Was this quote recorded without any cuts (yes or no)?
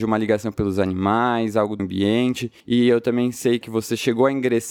no